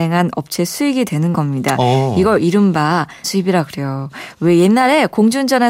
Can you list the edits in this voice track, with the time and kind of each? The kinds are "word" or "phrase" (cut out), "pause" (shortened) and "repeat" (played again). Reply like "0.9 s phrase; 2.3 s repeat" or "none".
3.2 s word